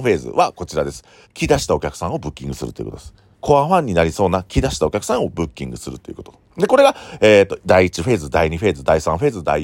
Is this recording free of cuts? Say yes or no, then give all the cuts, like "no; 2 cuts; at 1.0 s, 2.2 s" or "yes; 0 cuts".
no; 2 cuts; at 1.2 s, 3.3 s